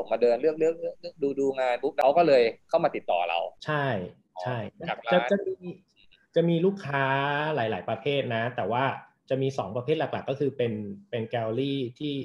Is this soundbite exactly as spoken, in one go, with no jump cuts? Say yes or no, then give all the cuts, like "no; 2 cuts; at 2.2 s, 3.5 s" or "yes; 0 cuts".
yes; 0 cuts